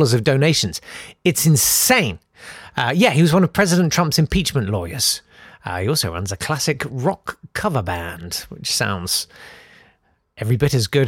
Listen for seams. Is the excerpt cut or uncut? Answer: uncut